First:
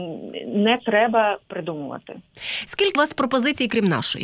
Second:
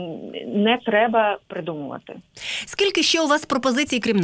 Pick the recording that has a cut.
first; 1 cut; at 3.0 s

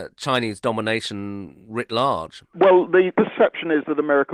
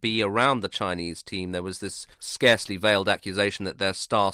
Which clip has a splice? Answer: second; 1 cut; at 2.1 s

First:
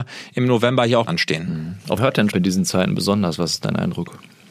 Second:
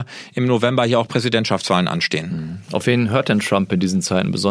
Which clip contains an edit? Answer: first; 3 cuts; at 1.1 s, 2.0 s, 2.3 s

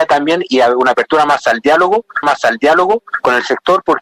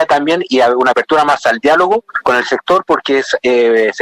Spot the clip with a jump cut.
first; 1 cut; at 2.2 s

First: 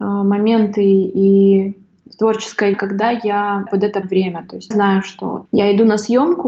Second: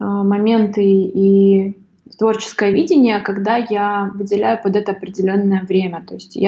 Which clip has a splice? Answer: first; 5 cuts; at 2.7 s, 3.7 s, 4.0 s, 4.7 s, 5.5 s

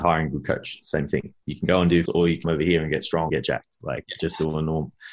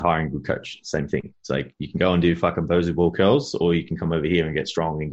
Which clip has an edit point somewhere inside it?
first; 4 cuts; at 1.4 s, 2.1 s, 2.4 s, 3.3 s

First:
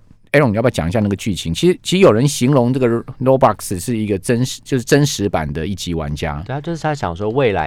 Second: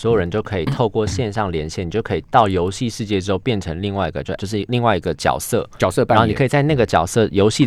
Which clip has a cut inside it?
second; 1 cut; at 4.4 s

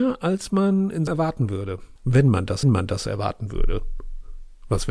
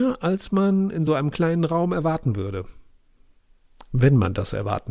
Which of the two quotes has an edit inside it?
first; 3 cuts; at 1.1 s, 2.0 s, 2.6 s

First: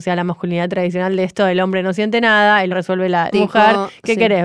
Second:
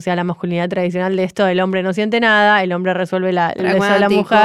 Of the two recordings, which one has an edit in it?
first; 2 cuts; at 2.7 s, 3.3 s

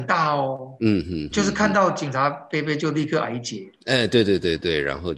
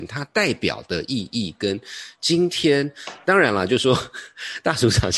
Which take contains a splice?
first; 2 cuts; at 1.3 s, 3.8 s

